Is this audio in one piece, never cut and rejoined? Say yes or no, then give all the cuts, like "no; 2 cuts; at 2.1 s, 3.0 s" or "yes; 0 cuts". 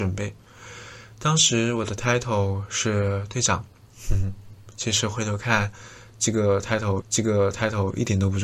no; 1 cut; at 7.0 s